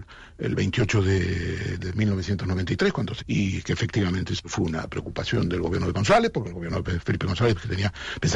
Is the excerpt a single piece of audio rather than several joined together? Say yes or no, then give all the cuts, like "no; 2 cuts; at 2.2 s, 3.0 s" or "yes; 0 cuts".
no; 3 cuts; at 1.8 s, 3.2 s, 5.9 s